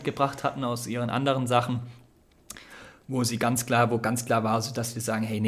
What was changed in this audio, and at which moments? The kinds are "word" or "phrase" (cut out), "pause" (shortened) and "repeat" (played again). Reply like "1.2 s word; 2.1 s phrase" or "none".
none